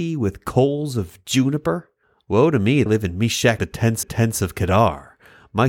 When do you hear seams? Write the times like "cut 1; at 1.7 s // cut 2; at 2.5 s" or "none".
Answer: cut 1; at 2.0 s // cut 2; at 2.9 s // cut 3; at 3.6 s // cut 4; at 4.0 s